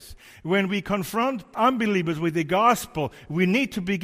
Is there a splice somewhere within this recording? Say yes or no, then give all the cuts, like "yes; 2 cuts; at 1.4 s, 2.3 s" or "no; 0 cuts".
yes; 1 cut; at 1.5 s